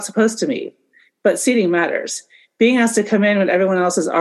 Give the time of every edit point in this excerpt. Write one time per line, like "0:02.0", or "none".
none